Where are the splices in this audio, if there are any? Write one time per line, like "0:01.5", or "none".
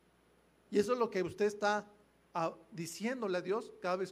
none